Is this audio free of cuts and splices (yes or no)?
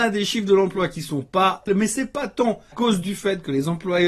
no